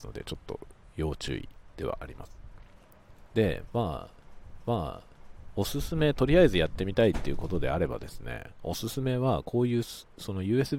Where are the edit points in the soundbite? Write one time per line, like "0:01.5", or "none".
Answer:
0:04.6